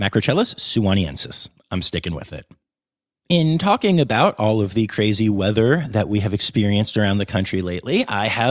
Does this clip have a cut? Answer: no; 0 cuts

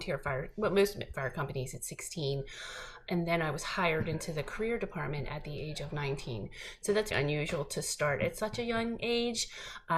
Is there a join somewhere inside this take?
yes; 2 cuts; at 1.1 s, 7.1 s

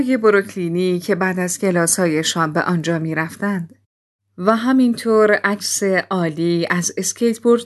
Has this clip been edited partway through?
no; 0 cuts

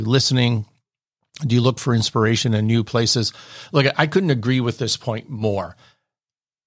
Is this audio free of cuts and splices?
yes; 0 cuts

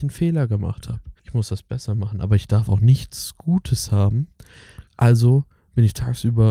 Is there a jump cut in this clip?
yes; 2 cuts; at 1.2 s, 4.9 s

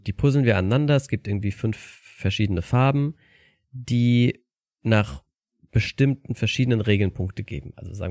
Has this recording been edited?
no; 0 cuts

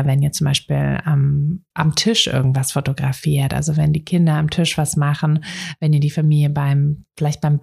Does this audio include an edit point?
yes; 1 cut; at 1.7 s

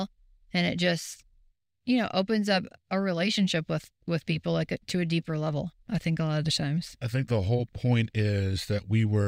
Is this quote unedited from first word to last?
yes; 0 cuts

